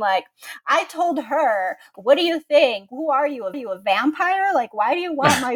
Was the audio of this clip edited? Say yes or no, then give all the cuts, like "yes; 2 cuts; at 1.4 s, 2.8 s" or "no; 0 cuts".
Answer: yes; 3 cuts; at 1.9 s, 2.9 s, 3.5 s